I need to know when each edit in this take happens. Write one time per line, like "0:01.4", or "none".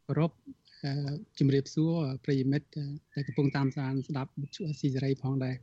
0:03.0